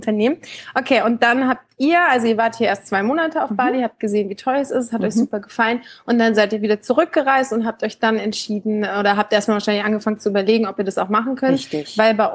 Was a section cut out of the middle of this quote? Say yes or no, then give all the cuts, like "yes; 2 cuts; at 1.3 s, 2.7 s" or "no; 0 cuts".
no; 0 cuts